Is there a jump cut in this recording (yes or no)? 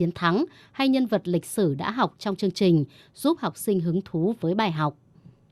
no